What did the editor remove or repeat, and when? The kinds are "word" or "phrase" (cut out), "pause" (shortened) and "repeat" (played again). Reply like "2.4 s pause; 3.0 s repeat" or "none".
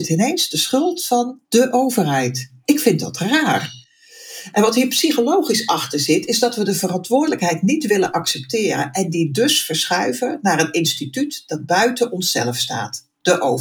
1.4 s pause